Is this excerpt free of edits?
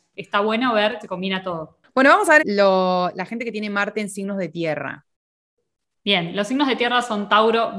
no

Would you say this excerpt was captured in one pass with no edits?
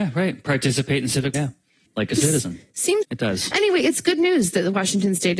no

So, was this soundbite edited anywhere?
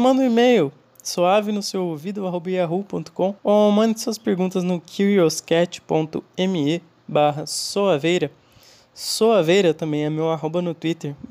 yes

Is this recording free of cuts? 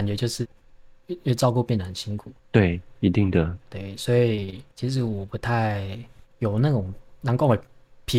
no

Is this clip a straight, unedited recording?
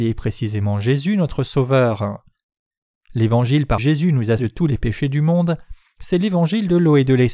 no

